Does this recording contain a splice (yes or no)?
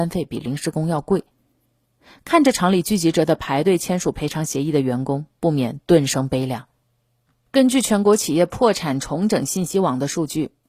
no